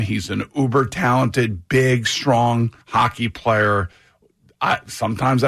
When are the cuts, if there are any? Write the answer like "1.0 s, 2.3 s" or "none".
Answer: 2.8 s